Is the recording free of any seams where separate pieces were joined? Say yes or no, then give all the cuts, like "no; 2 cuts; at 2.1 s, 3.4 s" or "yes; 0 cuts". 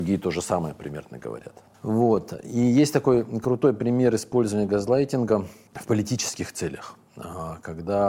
yes; 0 cuts